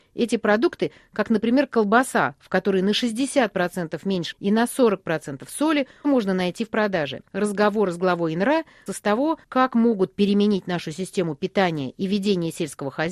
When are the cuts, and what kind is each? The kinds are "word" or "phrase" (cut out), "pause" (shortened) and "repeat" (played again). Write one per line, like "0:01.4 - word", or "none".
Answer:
0:04.3 - word
0:06.0 - word
0:07.3 - pause
0:08.9 - word
0:09.4 - pause